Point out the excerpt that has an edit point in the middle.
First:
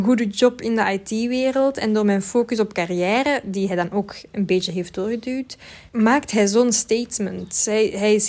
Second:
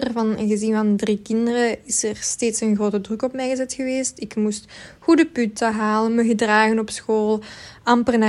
first; 1 cut; at 5.9 s

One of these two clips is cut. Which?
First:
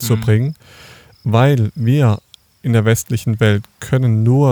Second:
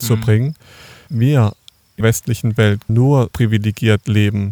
second; 4 cuts; at 1.1 s, 2.0 s, 2.9 s, 3.3 s

